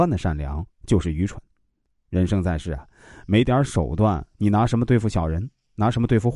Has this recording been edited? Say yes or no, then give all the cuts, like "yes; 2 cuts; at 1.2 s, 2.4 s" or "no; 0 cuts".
no; 0 cuts